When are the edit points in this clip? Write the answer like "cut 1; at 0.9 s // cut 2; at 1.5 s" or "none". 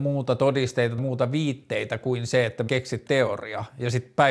cut 1; at 1.0 s // cut 2; at 2.7 s // cut 3; at 3.1 s